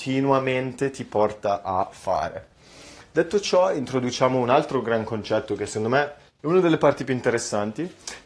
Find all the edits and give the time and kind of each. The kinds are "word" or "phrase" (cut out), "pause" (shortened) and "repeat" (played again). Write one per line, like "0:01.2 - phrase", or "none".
none